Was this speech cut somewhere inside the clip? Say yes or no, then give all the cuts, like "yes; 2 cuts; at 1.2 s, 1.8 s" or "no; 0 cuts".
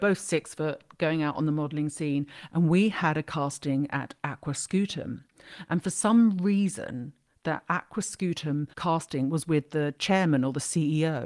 yes; 1 cut; at 8.7 s